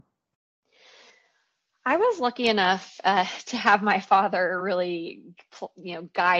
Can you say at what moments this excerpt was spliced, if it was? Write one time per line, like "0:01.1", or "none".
none